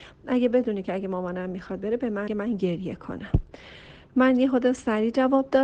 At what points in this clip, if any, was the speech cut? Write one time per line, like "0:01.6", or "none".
0:02.3